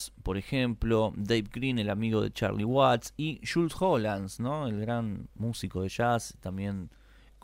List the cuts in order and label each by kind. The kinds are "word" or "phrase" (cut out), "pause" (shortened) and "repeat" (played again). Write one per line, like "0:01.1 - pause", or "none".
none